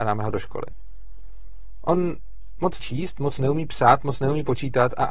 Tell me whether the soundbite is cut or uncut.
cut